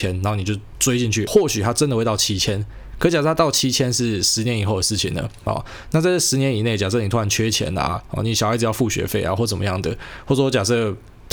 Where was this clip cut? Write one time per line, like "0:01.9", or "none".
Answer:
0:01.3